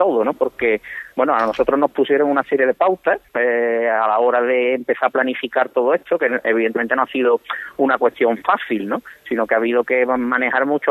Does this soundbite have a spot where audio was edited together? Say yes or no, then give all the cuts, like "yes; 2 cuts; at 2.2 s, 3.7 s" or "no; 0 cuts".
yes; 1 cut; at 3.3 s